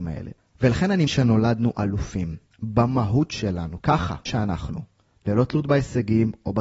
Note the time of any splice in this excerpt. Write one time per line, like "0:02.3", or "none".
0:01.1
0:02.5
0:03.8
0:04.3